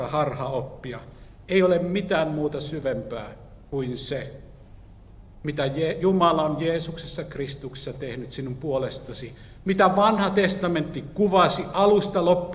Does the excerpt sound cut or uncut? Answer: uncut